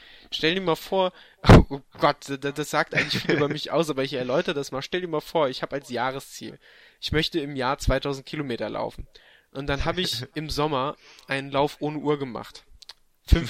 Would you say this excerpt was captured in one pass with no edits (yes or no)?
yes